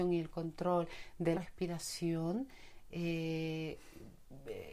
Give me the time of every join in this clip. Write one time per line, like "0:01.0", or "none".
0:01.3